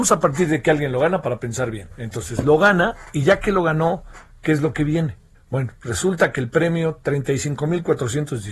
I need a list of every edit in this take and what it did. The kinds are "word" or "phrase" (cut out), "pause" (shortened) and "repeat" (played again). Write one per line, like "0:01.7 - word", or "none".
0:05.3 - pause